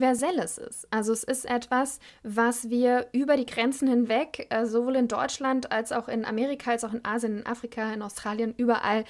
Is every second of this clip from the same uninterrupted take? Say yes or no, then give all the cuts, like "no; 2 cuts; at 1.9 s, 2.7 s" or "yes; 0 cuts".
no; 1 cut; at 2.1 s